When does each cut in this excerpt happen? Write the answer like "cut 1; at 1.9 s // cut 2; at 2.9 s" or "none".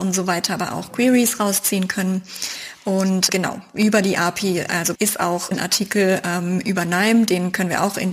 cut 1; at 3.3 s // cut 2; at 4.9 s // cut 3; at 5.5 s